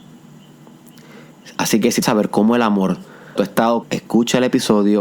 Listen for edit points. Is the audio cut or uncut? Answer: cut